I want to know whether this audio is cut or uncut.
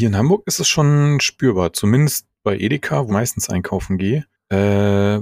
cut